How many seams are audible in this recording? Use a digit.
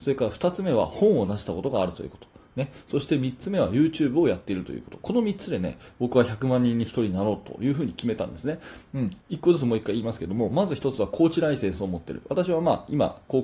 1